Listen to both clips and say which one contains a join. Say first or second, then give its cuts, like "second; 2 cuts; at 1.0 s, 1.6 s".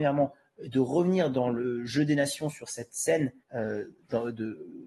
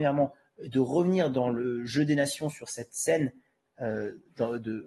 first; 1 cut; at 3.4 s